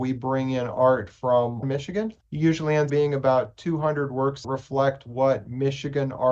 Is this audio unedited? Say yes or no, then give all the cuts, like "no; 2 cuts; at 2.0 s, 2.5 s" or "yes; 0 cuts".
no; 4 cuts; at 1.6 s, 2.2 s, 2.9 s, 4.4 s